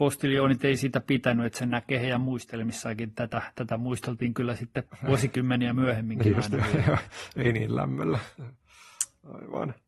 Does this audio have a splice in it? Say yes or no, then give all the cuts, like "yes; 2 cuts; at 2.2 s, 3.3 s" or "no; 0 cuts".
yes; 1 cut; at 4.9 s